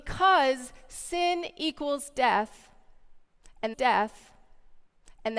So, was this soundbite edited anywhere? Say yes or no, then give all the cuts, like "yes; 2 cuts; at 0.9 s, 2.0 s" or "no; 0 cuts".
yes; 1 cut; at 3.7 s